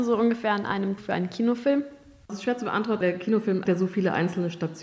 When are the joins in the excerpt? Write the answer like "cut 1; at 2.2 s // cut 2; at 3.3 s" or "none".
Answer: cut 1; at 1.0 s // cut 2; at 2.3 s // cut 3; at 3.0 s // cut 4; at 3.7 s